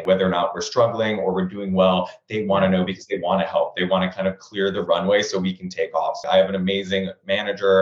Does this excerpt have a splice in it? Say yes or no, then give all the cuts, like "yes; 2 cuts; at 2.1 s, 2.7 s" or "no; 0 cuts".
no; 0 cuts